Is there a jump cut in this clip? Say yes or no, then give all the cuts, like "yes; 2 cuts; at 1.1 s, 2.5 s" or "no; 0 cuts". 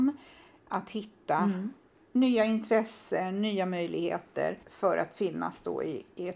yes; 1 cut; at 4.6 s